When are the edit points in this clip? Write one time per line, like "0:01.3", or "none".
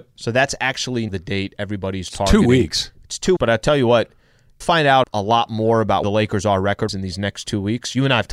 0:01.1
0:03.4
0:04.6
0:05.0
0:06.0
0:06.9